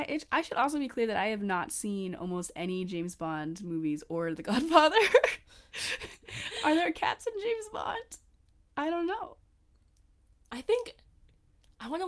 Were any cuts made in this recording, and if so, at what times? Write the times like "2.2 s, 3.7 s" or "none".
none